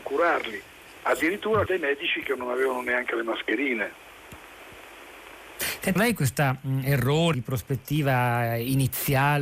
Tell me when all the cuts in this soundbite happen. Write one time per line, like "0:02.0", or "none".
0:01.7
0:06.0
0:07.3